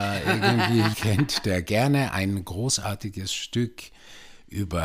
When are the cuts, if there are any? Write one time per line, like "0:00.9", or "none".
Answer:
0:00.9